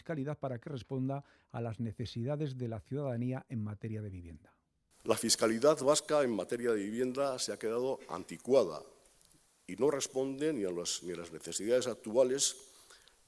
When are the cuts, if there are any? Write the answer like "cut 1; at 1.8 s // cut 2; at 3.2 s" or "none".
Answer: none